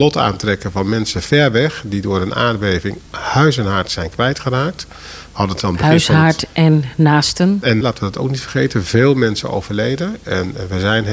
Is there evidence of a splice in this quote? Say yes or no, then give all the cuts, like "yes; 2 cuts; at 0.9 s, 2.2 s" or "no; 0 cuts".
yes; 2 cuts; at 3.1 s, 7.8 s